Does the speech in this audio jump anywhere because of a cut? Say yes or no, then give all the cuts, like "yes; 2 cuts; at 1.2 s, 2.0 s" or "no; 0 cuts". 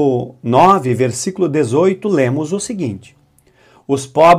no; 0 cuts